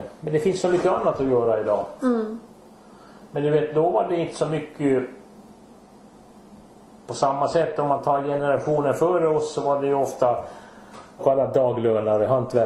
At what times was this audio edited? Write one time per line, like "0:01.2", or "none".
0:11.2